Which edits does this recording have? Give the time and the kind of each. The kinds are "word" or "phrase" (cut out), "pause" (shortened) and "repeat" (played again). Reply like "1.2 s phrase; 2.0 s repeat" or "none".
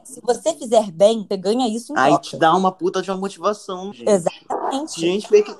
1.3 s word; 3.9 s word

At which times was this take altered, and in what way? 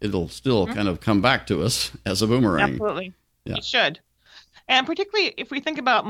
none

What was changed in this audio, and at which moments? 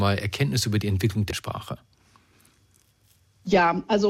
1.3 s word

